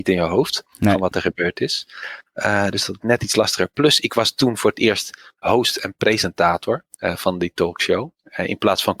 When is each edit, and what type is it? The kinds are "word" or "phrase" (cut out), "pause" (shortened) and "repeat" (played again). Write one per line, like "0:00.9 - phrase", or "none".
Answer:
0:03.0 - phrase
0:05.4 - word
0:06.9 - pause